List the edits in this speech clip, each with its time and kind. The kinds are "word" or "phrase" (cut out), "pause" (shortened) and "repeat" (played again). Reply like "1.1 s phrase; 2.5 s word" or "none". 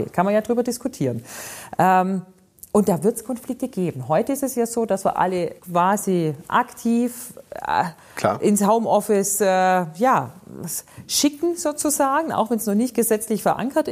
5.6 s pause